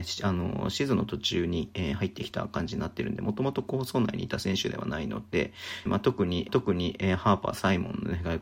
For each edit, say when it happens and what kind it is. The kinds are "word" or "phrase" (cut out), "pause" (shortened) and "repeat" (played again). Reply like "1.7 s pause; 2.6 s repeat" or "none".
5.9 s word; 6.5 s repeat

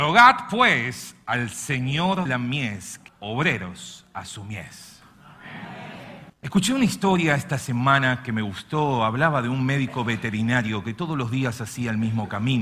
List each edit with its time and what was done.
2.3 s word; 3.1 s word; 6.3 s pause

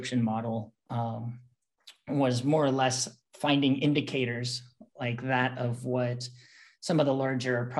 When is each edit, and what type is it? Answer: none

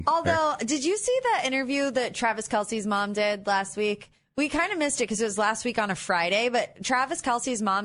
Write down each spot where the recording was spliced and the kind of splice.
none

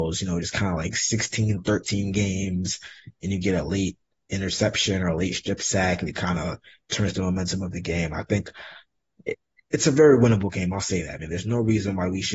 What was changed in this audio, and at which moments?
none

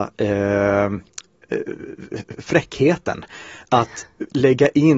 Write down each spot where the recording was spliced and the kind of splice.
none

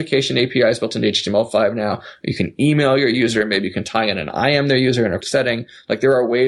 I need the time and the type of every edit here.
5.2 s word

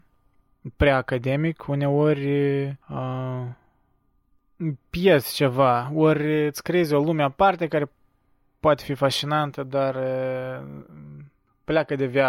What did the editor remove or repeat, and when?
2.8 s pause

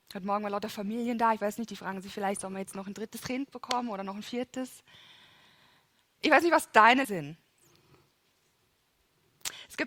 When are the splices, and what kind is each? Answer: 7.0 s word

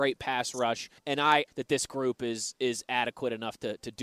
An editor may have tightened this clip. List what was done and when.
1.0 s pause; 1.5 s phrase

